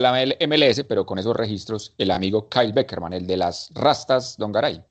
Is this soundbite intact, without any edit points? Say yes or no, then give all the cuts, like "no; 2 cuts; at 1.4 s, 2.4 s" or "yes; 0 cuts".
yes; 0 cuts